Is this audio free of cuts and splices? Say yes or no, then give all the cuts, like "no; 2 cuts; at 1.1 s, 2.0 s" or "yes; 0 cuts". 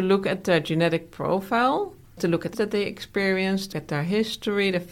no; 3 cuts; at 2.2 s, 2.5 s, 3.7 s